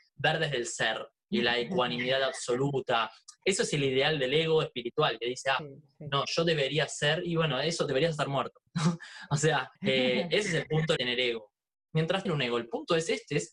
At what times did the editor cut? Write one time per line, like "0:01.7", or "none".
0:08.7
0:09.8
0:11.0
0:12.3